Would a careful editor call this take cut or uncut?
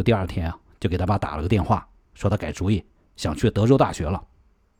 uncut